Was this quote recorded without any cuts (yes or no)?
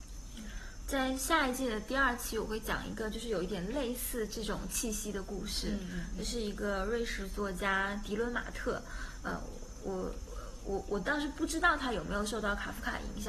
yes